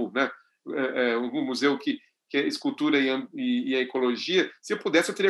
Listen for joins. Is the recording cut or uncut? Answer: uncut